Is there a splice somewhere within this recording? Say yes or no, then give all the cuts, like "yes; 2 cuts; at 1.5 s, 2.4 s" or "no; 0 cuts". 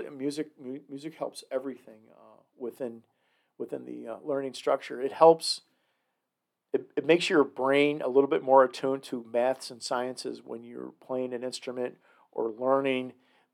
no; 0 cuts